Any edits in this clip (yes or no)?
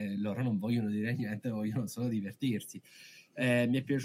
no